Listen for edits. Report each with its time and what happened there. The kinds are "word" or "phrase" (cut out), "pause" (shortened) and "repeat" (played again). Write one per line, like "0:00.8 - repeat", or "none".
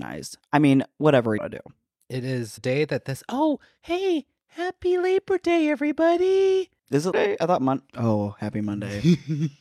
0:01.4 - phrase
0:02.6 - word
0:06.8 - pause
0:07.1 - word
0:07.9 - pause